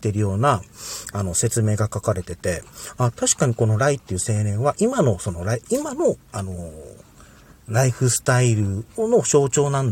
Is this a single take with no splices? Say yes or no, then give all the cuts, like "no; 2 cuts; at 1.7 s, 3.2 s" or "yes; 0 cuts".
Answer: yes; 0 cuts